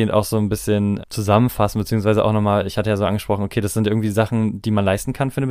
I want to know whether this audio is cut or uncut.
cut